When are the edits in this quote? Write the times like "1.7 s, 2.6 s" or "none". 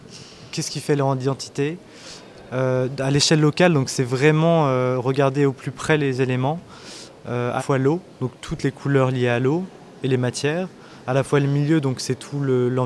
7.6 s